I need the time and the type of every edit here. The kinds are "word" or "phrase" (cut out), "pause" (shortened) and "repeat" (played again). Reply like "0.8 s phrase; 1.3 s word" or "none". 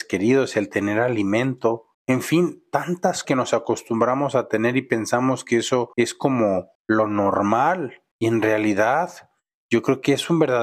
1.9 s pause; 3.2 s word; 5.9 s pause; 6.7 s pause; 8.1 s pause